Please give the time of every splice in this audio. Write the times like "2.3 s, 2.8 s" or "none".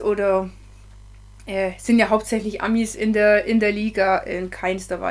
none